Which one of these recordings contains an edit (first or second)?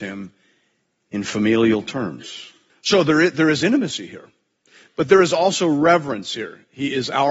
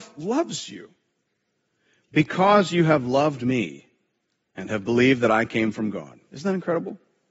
first